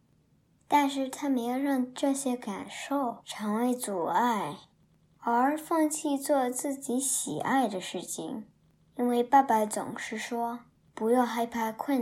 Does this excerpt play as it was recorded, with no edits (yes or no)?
yes